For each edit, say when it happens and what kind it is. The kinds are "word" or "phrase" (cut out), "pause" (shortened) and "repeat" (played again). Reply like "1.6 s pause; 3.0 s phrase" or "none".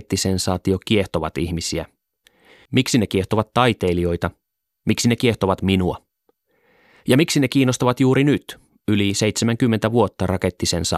none